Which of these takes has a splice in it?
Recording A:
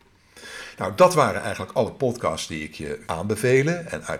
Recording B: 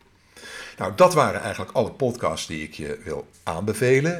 A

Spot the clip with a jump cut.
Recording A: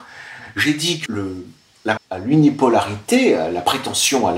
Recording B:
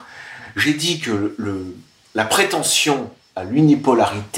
A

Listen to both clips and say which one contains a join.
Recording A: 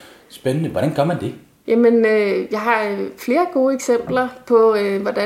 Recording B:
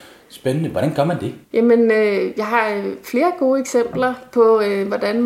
B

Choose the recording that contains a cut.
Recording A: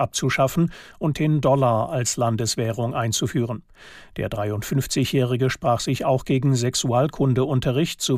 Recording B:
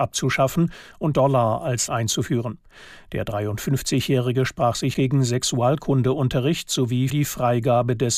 B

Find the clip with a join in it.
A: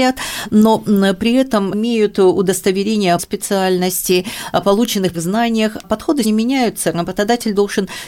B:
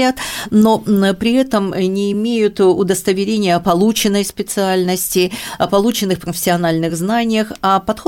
A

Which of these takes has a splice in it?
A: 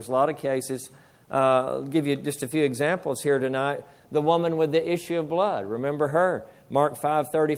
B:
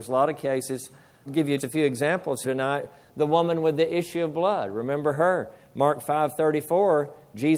B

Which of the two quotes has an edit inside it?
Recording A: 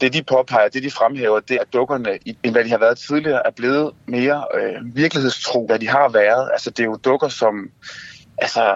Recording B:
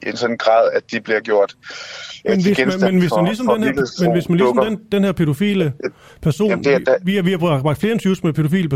A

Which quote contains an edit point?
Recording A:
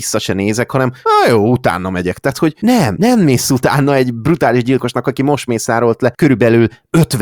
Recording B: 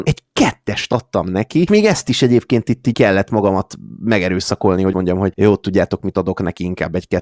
B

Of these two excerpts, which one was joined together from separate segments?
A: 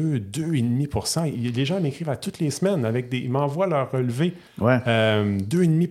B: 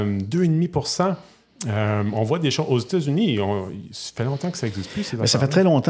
A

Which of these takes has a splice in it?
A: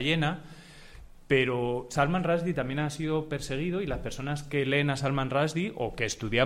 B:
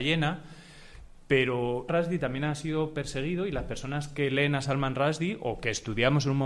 B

